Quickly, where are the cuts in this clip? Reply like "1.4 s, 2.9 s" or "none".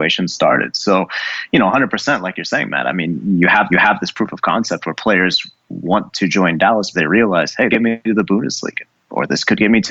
3.7 s, 6.9 s, 7.7 s